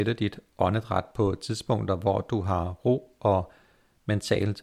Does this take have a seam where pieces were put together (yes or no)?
no